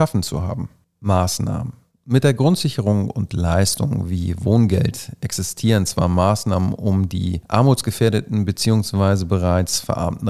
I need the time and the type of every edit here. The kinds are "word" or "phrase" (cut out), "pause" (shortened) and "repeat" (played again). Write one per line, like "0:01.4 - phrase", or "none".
none